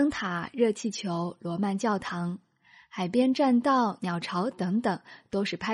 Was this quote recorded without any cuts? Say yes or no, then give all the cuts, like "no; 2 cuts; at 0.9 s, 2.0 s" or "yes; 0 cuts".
yes; 0 cuts